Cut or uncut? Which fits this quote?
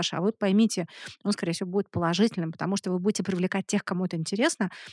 uncut